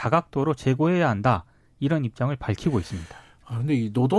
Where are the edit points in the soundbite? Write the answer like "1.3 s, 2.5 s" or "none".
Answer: none